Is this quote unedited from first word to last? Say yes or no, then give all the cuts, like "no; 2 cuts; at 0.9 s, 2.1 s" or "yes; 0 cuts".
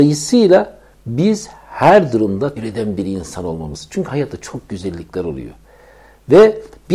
no; 1 cut; at 2.6 s